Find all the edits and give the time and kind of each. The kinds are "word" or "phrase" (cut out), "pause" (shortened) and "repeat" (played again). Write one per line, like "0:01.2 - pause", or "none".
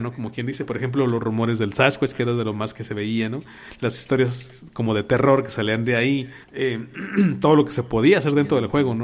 0:06.4 - pause